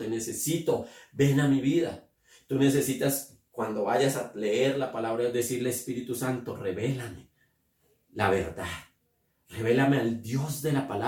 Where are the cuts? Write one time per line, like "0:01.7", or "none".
none